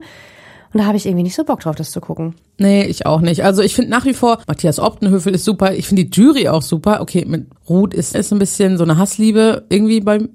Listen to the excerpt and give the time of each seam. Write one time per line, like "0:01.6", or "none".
0:04.4
0:07.6
0:08.1